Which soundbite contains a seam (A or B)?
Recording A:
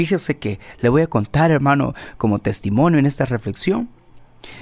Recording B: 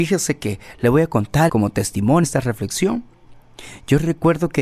B